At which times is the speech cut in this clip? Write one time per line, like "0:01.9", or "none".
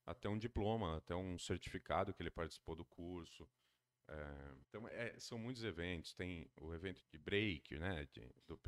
0:04.6
0:07.0